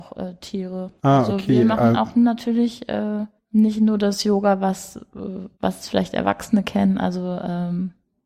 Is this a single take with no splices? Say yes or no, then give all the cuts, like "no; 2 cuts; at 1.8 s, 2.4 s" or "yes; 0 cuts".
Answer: no; 3 cuts; at 1.0 s, 3.4 s, 5.5 s